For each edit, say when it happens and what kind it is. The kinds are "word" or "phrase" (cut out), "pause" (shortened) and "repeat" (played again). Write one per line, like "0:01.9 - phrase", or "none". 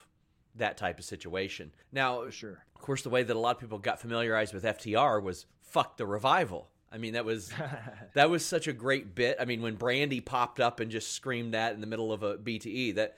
0:01.8 - pause
0:02.7 - pause